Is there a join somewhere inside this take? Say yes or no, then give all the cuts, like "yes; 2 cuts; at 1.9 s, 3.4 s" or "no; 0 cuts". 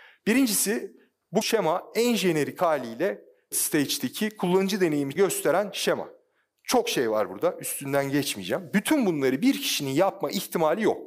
yes; 3 cuts; at 1.4 s, 3.5 s, 5.2 s